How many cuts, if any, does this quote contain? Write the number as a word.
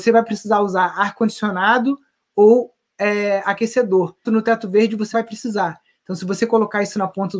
two